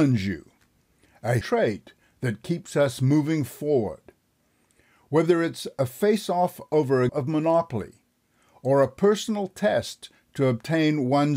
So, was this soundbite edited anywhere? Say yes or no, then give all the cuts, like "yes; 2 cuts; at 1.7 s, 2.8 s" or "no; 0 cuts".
yes; 2 cuts; at 1.4 s, 7.1 s